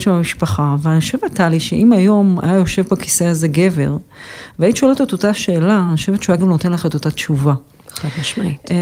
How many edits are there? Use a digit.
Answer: 0